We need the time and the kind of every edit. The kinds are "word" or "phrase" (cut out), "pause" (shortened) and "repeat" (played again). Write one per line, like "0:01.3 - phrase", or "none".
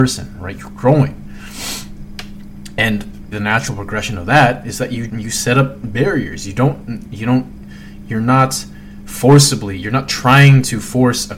0:03.3 - word
0:05.1 - word